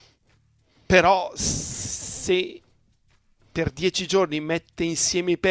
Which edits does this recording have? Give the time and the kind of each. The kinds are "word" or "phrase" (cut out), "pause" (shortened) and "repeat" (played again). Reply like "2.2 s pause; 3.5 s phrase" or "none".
none